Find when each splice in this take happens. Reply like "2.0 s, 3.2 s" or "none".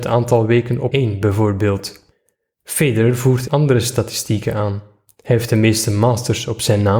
0.9 s, 3.5 s